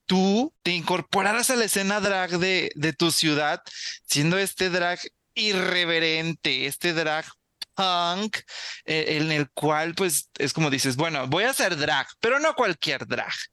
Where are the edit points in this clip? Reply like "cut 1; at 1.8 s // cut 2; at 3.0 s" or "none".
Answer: none